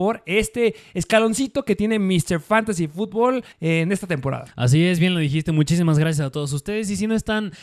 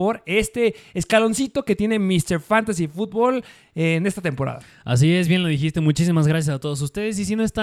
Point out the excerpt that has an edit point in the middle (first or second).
first